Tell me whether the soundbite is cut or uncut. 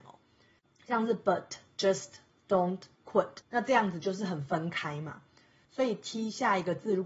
uncut